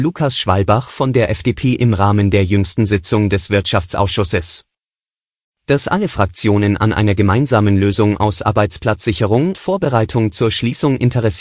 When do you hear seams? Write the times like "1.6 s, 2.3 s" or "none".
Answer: 9.5 s